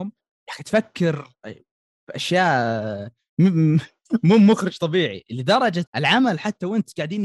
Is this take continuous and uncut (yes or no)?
no